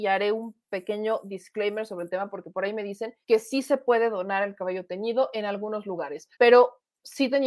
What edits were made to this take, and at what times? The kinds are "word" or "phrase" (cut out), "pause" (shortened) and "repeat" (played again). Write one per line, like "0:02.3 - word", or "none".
0:03.2 - pause
0:06.3 - pause